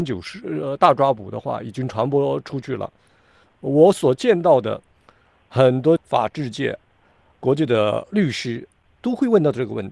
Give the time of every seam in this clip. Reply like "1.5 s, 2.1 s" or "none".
none